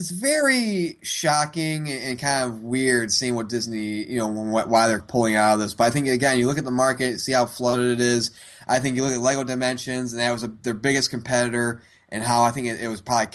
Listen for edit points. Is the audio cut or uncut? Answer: cut